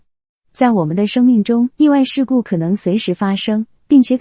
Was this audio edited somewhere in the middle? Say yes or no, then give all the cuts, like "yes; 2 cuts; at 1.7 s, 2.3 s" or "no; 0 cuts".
yes; 1 cut; at 1.7 s